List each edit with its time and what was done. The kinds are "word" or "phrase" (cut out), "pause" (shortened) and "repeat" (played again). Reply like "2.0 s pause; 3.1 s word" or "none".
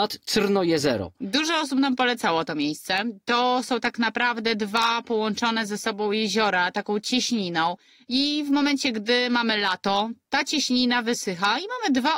none

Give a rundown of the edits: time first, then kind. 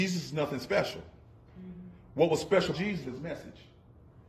2.7 s word; 3.0 s word

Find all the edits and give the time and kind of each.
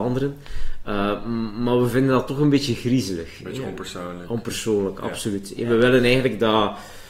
none

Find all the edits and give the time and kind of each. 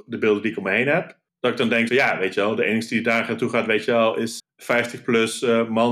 1.3 s pause; 1.9 s word; 4.4 s word

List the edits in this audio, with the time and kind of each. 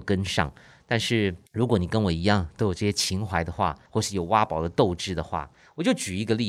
1.5 s pause; 3.8 s pause

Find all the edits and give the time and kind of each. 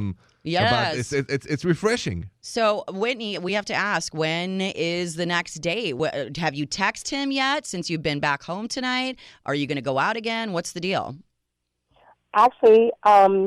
none

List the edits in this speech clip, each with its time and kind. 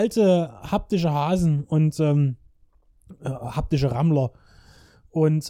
none

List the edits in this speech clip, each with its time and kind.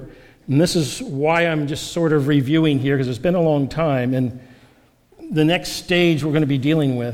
none

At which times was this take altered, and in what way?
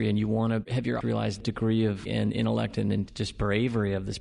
1.0 s word; 1.4 s word; 2.1 s word

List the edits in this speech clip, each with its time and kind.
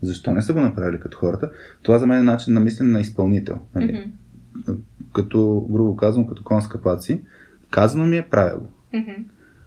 3.7 s pause; 7.6 s pause

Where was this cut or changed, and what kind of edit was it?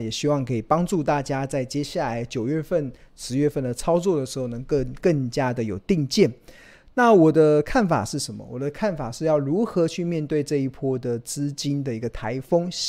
none

